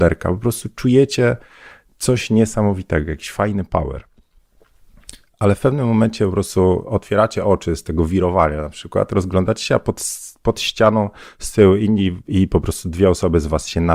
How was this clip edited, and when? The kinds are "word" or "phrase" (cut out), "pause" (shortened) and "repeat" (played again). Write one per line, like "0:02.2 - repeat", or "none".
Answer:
none

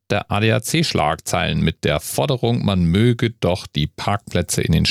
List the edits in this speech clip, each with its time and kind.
none

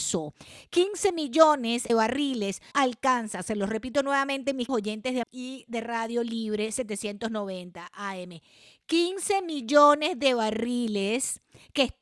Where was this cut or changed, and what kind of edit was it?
0:01.9 - word
0:02.7 - word
0:04.7 - word
0:05.2 - word

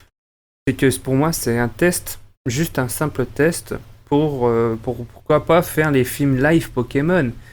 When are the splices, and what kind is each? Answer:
none

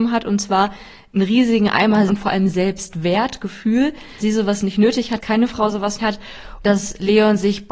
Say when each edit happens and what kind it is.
0:02.1 - word
0:04.2 - word
0:05.2 - word
0:06.0 - word
0:06.6 - word

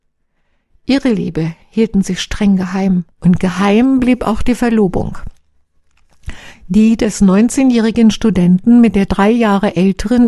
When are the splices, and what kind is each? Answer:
0:03.1 - pause

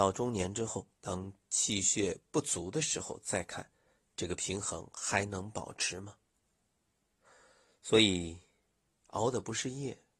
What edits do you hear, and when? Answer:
0:00.9 - pause

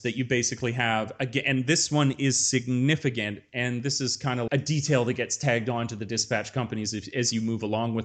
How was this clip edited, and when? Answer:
0:04.5 - word

